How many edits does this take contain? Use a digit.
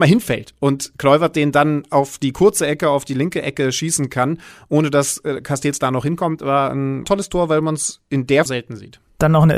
2